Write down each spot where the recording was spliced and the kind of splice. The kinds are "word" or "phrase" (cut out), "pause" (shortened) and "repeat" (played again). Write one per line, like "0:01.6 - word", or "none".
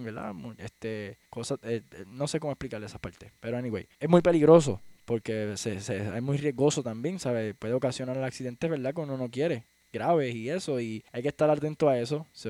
0:01.3 - pause
0:03.9 - pause
0:11.1 - pause